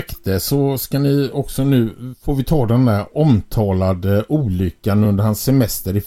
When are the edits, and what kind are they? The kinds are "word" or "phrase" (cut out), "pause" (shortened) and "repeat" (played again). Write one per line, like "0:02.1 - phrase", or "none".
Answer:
none